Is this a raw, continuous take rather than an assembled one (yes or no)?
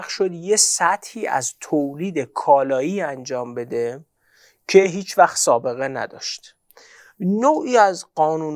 yes